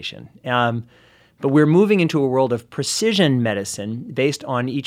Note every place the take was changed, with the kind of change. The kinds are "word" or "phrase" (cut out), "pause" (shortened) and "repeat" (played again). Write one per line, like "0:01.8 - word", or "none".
none